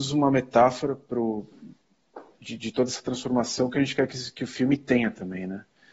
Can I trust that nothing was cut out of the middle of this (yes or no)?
yes